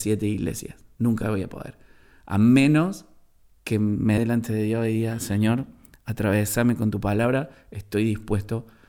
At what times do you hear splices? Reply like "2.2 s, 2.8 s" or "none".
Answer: 4.2 s